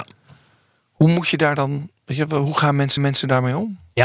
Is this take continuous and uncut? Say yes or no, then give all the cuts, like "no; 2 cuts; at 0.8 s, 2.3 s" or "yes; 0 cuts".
no; 1 cut; at 3.0 s